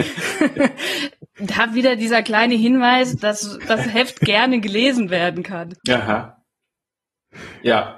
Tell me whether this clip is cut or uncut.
cut